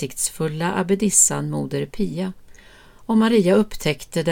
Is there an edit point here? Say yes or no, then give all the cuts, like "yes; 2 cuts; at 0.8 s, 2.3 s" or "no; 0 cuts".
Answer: no; 0 cuts